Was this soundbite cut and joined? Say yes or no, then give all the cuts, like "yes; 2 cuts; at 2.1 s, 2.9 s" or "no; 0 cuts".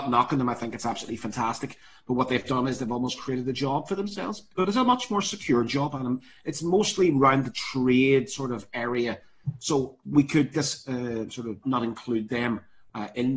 yes; 2 cuts; at 10.5 s, 11.6 s